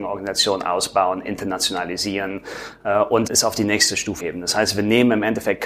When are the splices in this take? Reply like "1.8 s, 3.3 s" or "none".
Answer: 3.3 s, 4.2 s